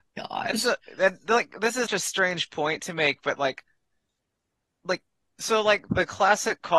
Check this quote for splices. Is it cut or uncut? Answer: cut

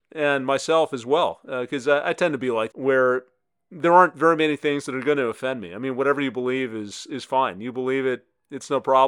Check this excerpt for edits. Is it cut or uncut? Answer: cut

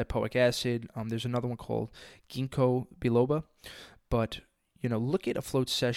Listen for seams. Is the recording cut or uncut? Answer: uncut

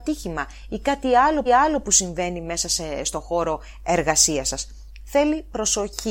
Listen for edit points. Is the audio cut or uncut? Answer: cut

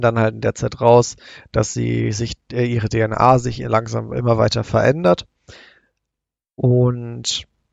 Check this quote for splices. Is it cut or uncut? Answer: uncut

